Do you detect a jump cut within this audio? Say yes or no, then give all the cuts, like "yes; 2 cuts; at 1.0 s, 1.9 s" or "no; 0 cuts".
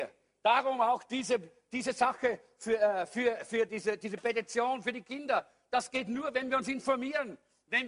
no; 0 cuts